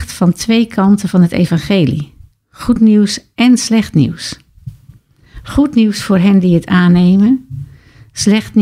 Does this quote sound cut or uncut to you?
uncut